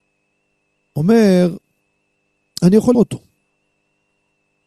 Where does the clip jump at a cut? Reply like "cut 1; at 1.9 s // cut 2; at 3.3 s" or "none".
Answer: cut 1; at 2.9 s